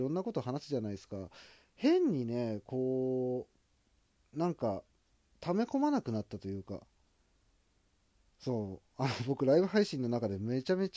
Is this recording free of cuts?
yes; 0 cuts

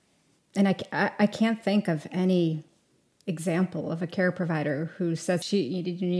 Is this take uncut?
yes; 0 cuts

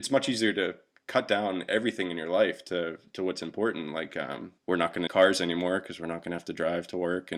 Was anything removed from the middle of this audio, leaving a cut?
yes; 2 cuts; at 4.6 s, 5.1 s

